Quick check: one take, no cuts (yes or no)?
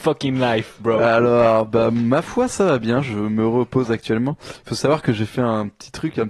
yes